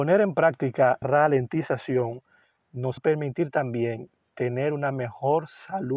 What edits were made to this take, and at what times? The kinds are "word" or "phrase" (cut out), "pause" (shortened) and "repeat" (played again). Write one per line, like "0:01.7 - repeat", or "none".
0:01.0 - word
0:03.0 - word